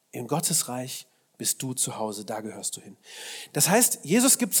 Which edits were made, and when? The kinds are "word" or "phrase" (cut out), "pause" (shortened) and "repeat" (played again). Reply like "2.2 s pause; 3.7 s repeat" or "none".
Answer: none